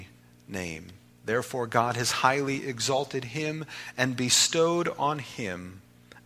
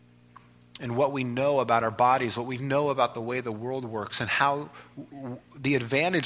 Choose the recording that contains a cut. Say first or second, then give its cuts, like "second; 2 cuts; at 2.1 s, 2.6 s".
first; 1 cut; at 1.1 s